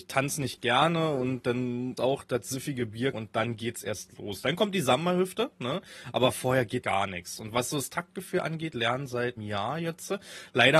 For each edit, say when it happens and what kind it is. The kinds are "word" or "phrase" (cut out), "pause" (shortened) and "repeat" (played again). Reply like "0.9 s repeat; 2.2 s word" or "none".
2.0 s word; 3.1 s word; 6.8 s word; 8.7 s word; 9.4 s word